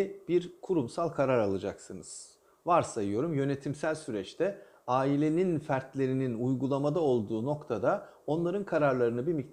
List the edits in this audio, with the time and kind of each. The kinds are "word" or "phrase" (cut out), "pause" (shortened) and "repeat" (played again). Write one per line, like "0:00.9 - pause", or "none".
none